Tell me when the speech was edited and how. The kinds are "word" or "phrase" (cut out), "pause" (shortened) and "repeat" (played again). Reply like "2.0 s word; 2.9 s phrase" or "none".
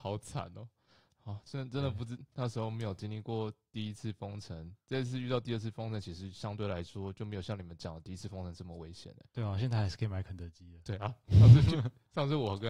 1.5 s phrase; 9.3 s pause